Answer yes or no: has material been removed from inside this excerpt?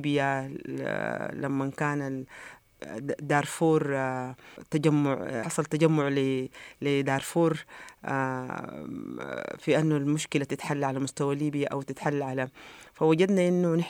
no